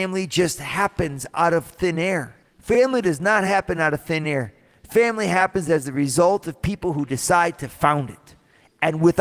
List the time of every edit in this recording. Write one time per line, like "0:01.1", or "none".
0:02.4